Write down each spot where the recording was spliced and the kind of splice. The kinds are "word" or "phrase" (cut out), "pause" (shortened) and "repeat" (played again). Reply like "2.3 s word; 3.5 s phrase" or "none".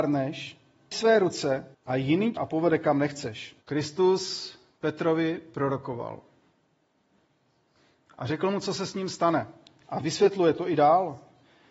0.9 s word; 1.7 s pause; 2.4 s word; 3.6 s pause